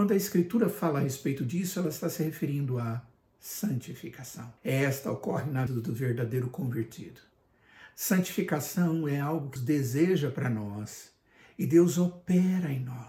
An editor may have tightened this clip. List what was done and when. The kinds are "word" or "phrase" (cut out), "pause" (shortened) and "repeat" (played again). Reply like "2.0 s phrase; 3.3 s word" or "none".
4.6 s pause; 5.7 s word; 9.6 s word